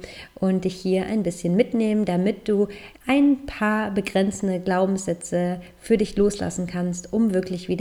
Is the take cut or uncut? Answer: cut